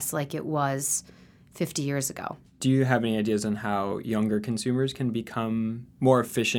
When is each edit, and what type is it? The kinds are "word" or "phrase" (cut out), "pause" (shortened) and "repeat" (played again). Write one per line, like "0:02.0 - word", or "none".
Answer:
none

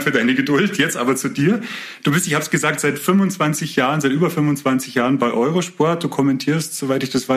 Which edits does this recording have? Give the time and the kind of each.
none

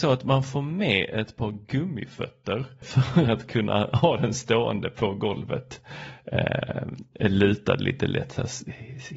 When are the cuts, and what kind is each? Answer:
0:02.8 - word

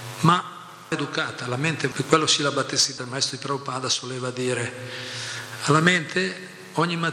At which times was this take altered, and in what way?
0:00.9 - word
0:01.9 - word
0:03.0 - word

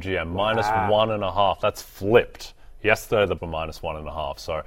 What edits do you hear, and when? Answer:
0:03.4 - word

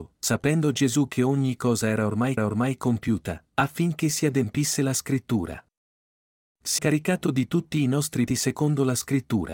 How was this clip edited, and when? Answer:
0:02.4 - repeat
0:06.8 - word
0:08.3 - word

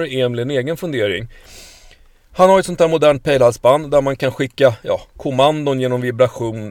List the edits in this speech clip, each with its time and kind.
none

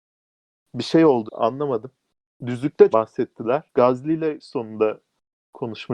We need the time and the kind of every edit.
0:01.3 - word
0:02.9 - phrase
0:03.7 - pause
0:04.4 - phrase

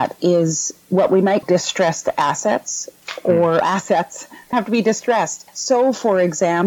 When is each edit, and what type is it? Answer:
0:01.4 - word
0:03.6 - word
0:04.5 - word
0:05.5 - pause

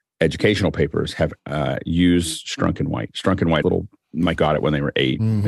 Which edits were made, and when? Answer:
0:01.4 - pause
0:03.6 - phrase
0:04.3 - word

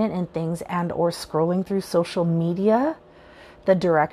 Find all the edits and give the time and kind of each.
none

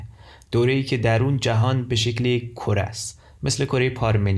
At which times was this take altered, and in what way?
none

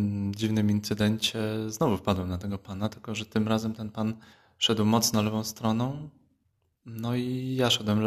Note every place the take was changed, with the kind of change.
0:04.3 - pause
0:06.4 - pause

